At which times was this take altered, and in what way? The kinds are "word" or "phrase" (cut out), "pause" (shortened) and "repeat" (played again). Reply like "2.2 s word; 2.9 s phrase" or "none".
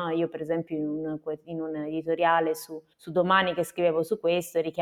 2.9 s pause